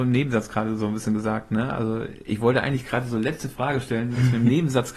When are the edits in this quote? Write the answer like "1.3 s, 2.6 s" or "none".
none